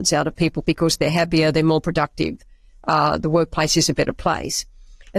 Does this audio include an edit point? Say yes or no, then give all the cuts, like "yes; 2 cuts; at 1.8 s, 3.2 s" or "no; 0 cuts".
no; 0 cuts